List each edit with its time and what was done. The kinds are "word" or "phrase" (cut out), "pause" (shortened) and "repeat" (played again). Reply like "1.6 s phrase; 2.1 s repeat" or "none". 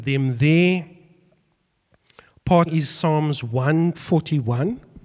2.7 s word; 3.9 s word

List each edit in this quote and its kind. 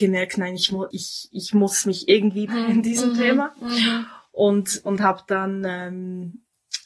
0.9 s word; 2.5 s word

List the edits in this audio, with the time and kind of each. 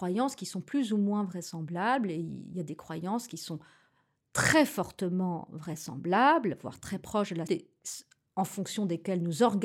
7.5 s word

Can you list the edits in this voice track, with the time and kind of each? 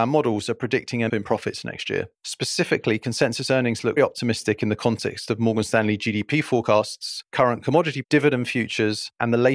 1.1 s phrase; 2.1 s pause; 4.0 s word; 8.0 s word

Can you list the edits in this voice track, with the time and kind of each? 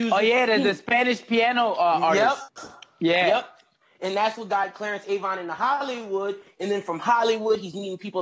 none

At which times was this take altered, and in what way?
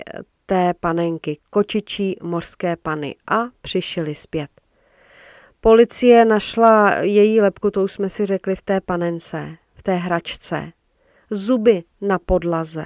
none

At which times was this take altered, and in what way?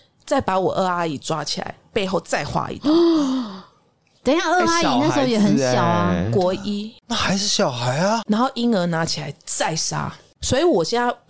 none

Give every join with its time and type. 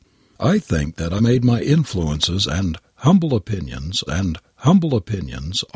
1.2 s word; 4.1 s repeat

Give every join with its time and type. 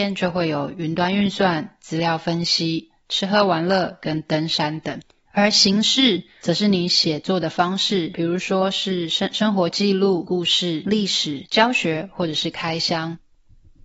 none

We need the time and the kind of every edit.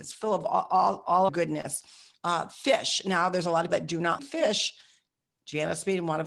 1.3 s word; 3.7 s word; 4.2 s word

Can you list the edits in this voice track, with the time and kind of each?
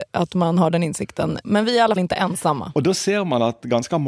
1.4 s word; 2.0 s word

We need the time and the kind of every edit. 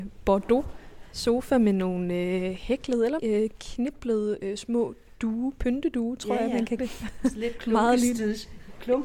3.2 s word; 6.8 s word

